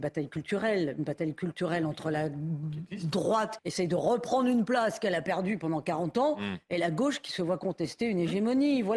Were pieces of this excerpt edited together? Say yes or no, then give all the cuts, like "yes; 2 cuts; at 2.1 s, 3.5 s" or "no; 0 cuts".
yes; 1 cut; at 3.6 s